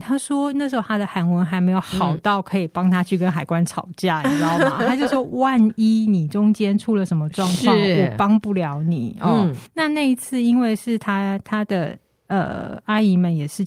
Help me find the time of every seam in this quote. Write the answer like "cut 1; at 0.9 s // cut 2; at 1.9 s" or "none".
cut 1; at 9.7 s